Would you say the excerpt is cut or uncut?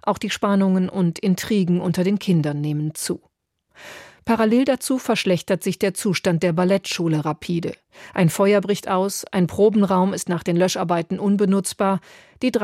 uncut